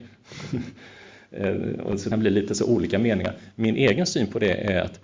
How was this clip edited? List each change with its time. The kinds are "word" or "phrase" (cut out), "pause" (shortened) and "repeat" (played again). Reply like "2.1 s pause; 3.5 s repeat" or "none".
2.1 s word